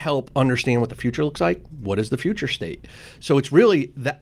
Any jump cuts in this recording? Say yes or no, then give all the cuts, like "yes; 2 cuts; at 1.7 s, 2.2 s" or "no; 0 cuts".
no; 0 cuts